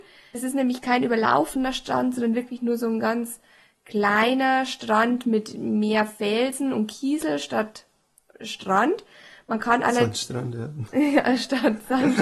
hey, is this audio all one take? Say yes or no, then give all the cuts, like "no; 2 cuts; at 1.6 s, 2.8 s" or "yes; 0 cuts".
yes; 0 cuts